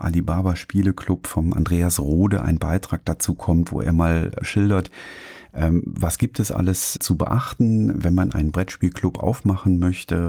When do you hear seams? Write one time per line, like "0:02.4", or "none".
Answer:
0:04.4
0:07.0